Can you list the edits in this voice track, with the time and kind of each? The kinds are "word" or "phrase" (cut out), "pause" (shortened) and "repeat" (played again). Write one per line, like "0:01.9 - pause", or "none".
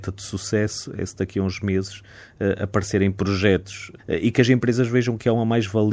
none